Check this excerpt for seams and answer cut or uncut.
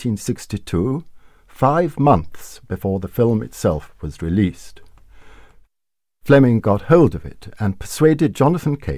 uncut